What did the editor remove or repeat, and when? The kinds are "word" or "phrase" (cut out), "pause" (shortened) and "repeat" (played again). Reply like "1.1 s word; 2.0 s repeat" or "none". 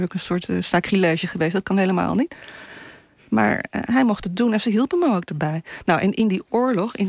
none